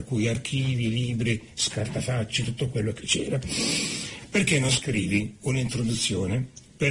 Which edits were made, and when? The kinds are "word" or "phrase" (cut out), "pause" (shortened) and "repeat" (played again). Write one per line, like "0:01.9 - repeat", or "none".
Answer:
none